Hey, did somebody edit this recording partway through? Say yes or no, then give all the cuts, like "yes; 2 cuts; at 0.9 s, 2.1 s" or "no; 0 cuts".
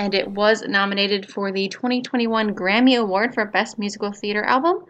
no; 0 cuts